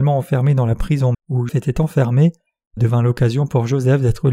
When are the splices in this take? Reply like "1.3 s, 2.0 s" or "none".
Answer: 1.1 s, 1.5 s, 2.8 s